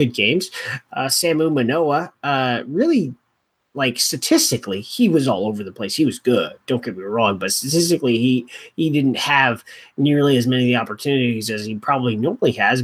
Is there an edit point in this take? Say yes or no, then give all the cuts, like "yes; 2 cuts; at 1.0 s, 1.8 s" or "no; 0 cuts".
no; 0 cuts